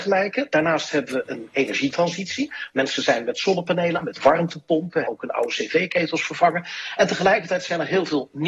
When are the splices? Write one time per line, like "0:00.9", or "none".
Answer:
0:04.0
0:05.0